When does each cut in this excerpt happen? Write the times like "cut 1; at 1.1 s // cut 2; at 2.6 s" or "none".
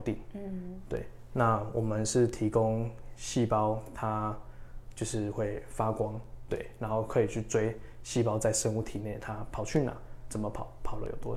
cut 1; at 6.5 s